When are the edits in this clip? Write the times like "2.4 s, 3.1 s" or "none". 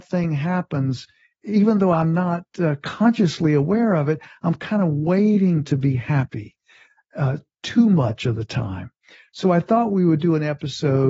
none